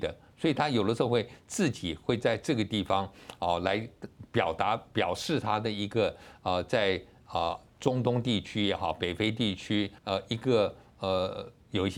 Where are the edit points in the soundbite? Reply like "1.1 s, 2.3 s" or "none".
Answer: 10.0 s